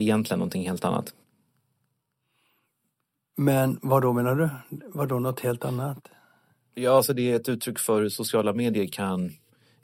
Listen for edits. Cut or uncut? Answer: uncut